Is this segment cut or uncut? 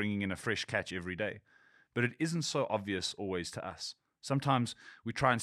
uncut